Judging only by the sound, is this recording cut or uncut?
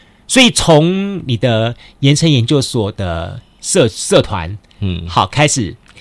uncut